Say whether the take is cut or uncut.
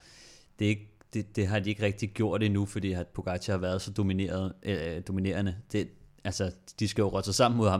uncut